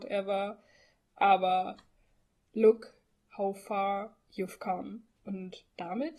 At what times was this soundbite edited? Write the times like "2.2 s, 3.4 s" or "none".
none